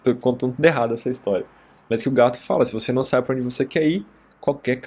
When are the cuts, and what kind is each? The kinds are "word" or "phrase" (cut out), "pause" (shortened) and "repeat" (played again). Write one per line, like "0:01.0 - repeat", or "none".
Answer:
none